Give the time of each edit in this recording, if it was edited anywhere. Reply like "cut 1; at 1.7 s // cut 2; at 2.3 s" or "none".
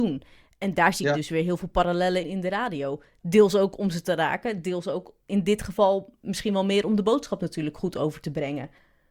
cut 1; at 2.2 s

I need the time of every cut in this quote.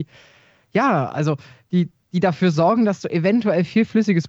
none

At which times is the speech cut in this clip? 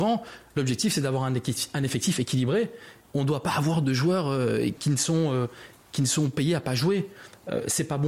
cut 1; at 4.8 s

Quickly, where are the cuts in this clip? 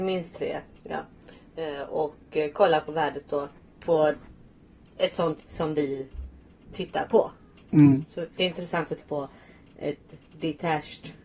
cut 1; at 5.4 s // cut 2; at 8.4 s // cut 3; at 9.0 s

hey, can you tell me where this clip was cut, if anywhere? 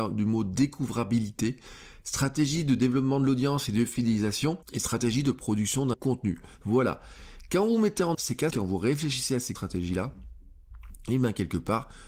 cut 1; at 4.6 s // cut 2; at 5.9 s // cut 3; at 8.1 s // cut 4; at 8.5 s // cut 5; at 9.6 s

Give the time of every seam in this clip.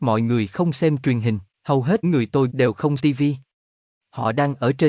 cut 1; at 1.5 s // cut 2; at 2.0 s // cut 3; at 2.5 s // cut 4; at 3.0 s

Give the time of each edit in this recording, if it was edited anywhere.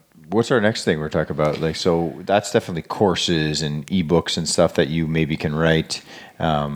none

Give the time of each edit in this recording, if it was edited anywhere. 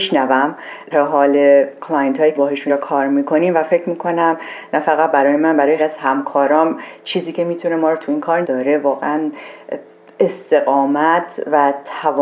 cut 1; at 0.9 s // cut 2; at 2.4 s // cut 3; at 2.7 s // cut 4; at 5.8 s // cut 5; at 8.4 s

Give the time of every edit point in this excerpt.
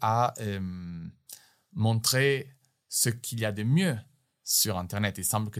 none

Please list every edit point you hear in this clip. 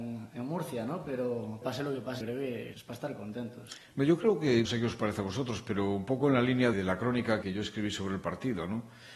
cut 1; at 1.6 s // cut 2; at 2.2 s // cut 3; at 2.7 s // cut 4; at 4.7 s // cut 5; at 6.7 s // cut 6; at 7.4 s

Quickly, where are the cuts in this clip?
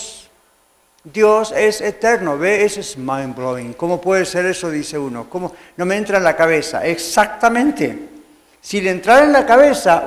none

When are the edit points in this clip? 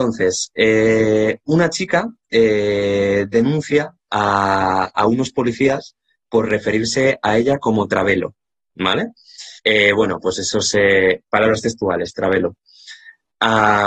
cut 1; at 9.6 s

